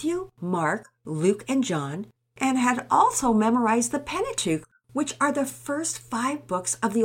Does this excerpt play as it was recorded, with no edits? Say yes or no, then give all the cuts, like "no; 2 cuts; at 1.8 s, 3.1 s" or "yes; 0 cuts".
yes; 0 cuts